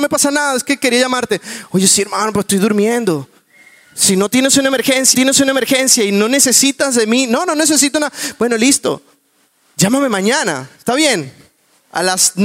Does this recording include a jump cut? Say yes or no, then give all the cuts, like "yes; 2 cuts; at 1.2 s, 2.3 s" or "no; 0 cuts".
yes; 1 cut; at 5.1 s